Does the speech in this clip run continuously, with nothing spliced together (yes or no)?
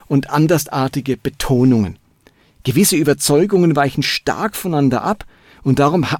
yes